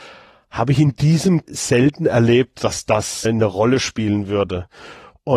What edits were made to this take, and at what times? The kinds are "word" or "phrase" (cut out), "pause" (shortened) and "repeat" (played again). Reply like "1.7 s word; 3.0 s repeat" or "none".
1.5 s word; 3.2 s word